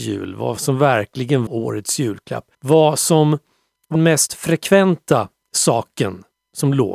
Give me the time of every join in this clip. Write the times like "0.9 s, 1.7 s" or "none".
1.5 s, 2.5 s, 3.9 s, 5.4 s